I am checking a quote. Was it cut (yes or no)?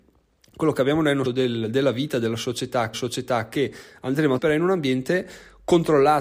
yes